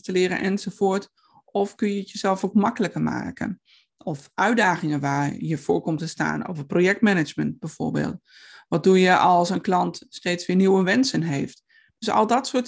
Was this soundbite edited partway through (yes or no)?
no